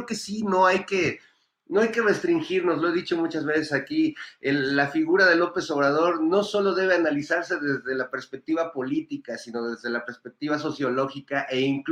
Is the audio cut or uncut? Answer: uncut